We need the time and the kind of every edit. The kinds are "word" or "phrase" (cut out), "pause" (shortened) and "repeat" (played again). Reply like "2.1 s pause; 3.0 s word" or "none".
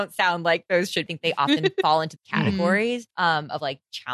1.1 s phrase; 2.2 s phrase; 3.1 s pause

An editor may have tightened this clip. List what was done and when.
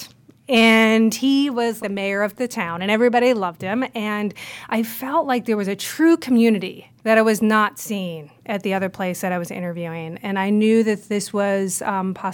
1.8 s word; 7.0 s pause; 8.4 s pause

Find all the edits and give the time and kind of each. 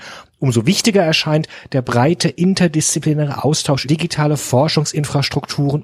3.8 s word

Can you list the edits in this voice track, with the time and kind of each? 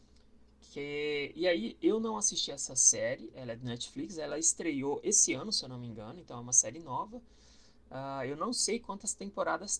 none

